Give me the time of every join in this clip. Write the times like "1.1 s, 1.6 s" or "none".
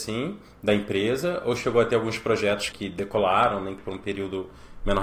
2.7 s, 3.8 s

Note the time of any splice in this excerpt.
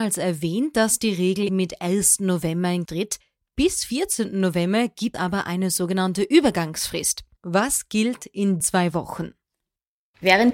1.5 s, 2.9 s, 5.1 s, 8.6 s

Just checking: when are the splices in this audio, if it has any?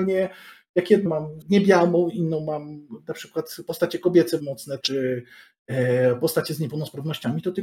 1.1 s, 1.4 s, 4.4 s, 4.8 s

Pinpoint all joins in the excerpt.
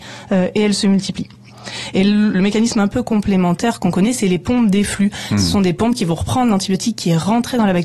2.3 s

